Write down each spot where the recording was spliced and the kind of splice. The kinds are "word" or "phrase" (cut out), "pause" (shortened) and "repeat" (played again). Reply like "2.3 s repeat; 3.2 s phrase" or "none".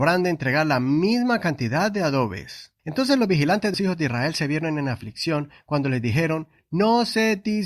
2.8 s pause; 3.7 s word